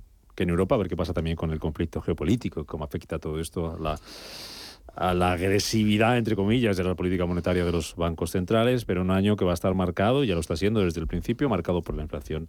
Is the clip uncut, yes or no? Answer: yes